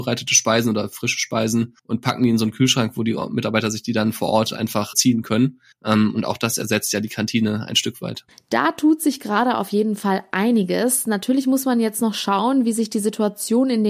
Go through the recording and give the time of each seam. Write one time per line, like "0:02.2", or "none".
0:01.8
0:04.9
0:05.7